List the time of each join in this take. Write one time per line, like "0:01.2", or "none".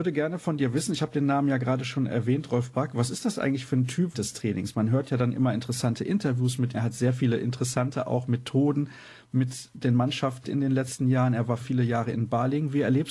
0:04.1
0:06.7
0:10.4
0:11.6

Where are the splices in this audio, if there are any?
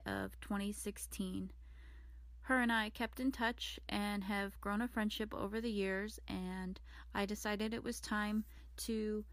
none

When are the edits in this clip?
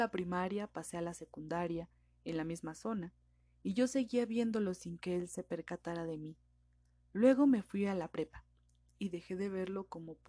none

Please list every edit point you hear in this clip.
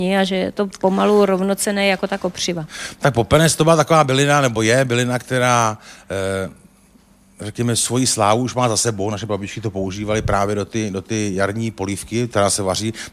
none

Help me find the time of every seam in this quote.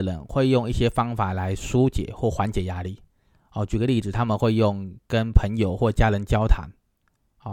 none

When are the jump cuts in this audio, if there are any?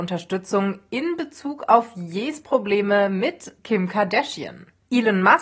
0:03.6

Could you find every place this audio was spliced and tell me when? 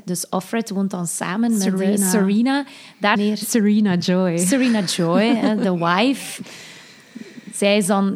0:03.2

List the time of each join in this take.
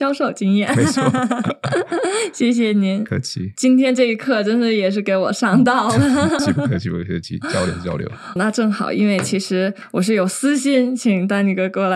0:06.4
0:08.4

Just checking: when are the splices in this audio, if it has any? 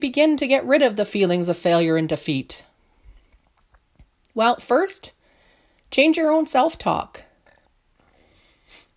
none

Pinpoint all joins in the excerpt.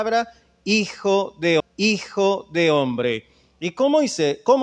0:01.6

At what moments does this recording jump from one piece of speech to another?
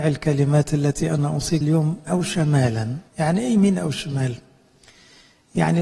0:01.6
0:02.1
0:03.1

